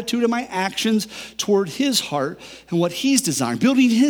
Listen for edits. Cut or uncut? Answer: uncut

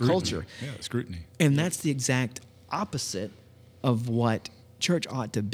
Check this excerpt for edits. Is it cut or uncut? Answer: uncut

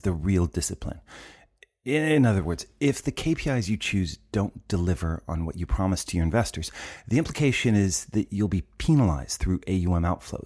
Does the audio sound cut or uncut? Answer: uncut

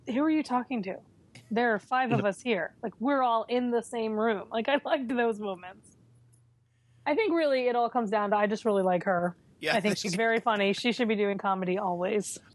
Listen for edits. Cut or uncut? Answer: uncut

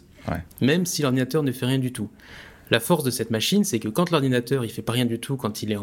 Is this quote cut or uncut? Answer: uncut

